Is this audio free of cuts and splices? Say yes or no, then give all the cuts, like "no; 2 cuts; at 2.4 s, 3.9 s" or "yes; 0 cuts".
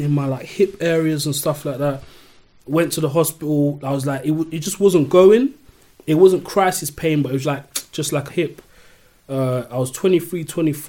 no; 2 cuts; at 7.4 s, 8.3 s